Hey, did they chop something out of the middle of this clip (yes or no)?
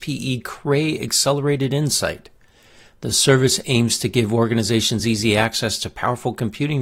no